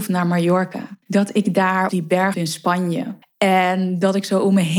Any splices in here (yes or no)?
yes